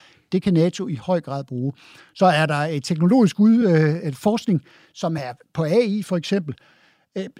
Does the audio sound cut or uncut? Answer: uncut